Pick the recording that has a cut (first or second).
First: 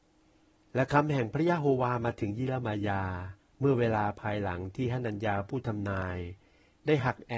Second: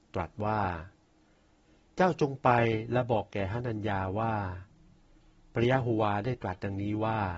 first